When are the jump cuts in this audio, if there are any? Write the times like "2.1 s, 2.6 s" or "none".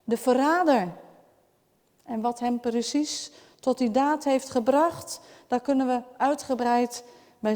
none